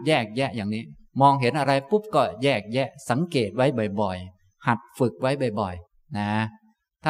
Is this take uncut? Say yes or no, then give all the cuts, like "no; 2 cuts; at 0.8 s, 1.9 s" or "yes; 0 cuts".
no; 2 cuts; at 1.1 s, 5.9 s